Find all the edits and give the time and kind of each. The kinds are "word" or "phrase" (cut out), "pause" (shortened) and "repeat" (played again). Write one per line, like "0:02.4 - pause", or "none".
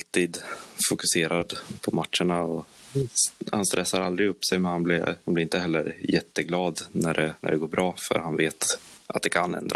none